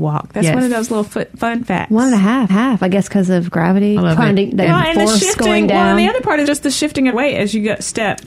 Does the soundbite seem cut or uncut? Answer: cut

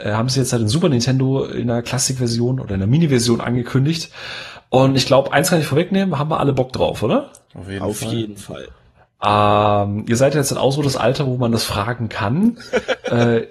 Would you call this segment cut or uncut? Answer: uncut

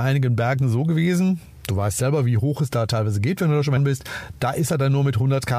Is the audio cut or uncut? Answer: cut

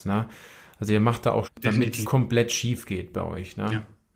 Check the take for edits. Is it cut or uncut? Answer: cut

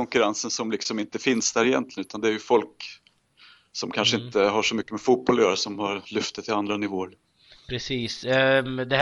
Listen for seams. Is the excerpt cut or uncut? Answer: uncut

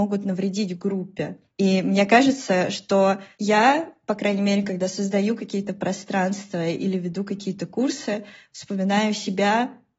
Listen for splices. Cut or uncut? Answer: uncut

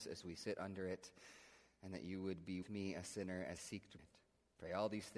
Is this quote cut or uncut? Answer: cut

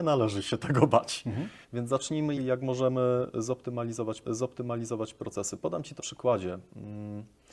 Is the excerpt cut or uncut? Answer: cut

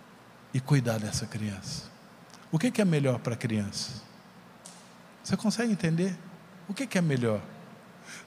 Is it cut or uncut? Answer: uncut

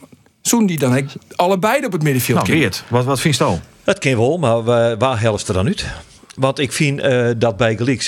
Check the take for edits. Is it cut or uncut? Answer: uncut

